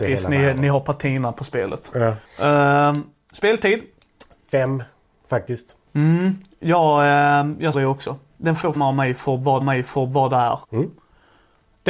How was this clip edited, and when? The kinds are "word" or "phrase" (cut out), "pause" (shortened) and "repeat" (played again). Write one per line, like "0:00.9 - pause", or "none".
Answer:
0:02.2 - pause
0:05.9 - pause
0:07.7 - word
0:08.8 - word
0:09.6 - repeat
0:10.6 - pause